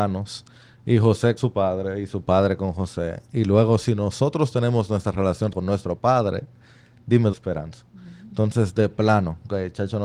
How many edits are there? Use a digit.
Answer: 3